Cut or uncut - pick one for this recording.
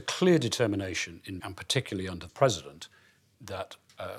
cut